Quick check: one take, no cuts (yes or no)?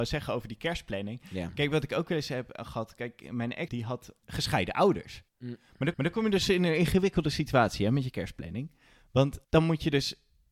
no